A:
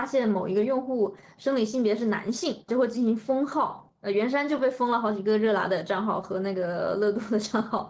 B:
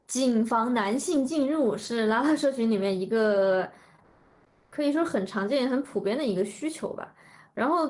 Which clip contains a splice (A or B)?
A